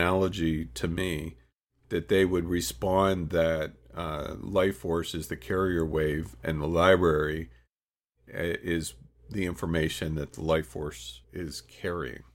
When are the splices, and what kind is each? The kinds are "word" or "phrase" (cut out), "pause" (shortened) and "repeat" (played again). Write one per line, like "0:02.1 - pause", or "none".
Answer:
0:03.8 - pause
0:11.2 - pause